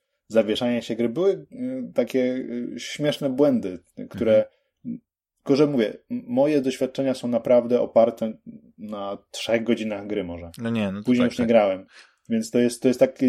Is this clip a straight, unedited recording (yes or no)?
yes